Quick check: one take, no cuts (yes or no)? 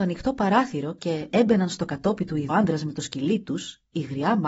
no